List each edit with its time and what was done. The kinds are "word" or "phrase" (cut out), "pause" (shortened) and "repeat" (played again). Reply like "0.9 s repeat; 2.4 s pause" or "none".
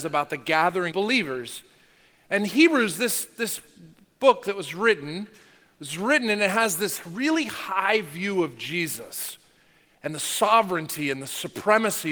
0.9 s word